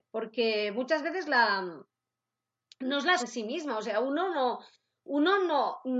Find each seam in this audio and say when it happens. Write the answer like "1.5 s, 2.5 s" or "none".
3.2 s